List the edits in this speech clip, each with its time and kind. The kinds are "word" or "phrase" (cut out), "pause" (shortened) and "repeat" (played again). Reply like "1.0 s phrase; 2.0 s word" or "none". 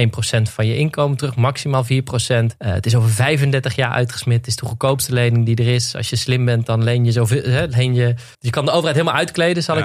2.6 s pause; 8.3 s pause